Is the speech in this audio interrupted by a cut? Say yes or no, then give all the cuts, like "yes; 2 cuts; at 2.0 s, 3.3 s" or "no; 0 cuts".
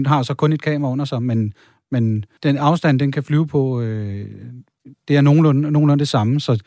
yes; 1 cut; at 2.4 s